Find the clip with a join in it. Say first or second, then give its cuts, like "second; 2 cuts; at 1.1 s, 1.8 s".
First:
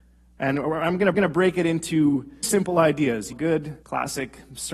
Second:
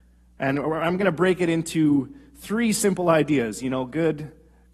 first; 4 cuts; at 1.1 s, 2.4 s, 3.3 s, 3.8 s